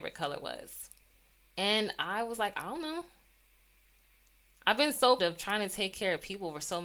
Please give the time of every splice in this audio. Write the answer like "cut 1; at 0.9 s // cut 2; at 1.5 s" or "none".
cut 1; at 5.2 s